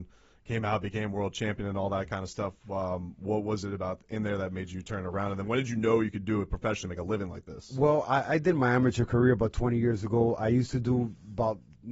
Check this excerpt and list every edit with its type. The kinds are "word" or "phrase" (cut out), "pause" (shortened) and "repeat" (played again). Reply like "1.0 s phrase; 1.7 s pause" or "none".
none